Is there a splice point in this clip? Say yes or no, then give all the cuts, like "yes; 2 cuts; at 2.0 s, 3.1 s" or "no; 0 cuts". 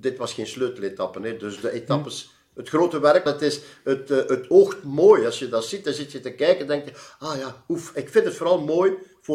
yes; 1 cut; at 3.3 s